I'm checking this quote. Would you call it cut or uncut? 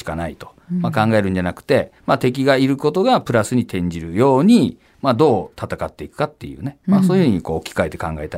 cut